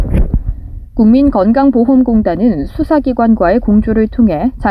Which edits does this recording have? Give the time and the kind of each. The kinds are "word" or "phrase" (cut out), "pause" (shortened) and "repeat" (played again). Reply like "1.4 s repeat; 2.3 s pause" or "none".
none